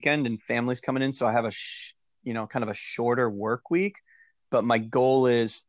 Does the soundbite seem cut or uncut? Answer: uncut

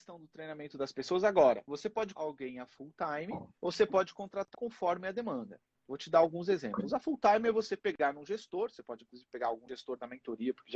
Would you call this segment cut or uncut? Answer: cut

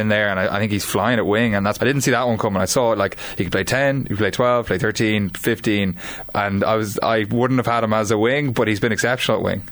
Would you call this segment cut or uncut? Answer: cut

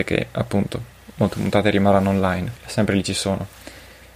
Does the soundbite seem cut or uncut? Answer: cut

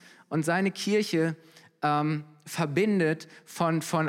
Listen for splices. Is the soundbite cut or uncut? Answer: uncut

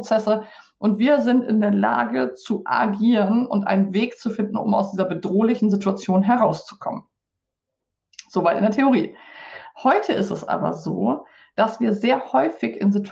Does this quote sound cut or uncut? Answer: uncut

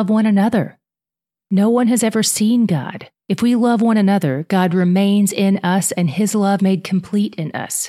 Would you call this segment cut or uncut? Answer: cut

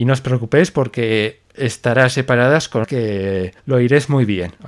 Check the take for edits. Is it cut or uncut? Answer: cut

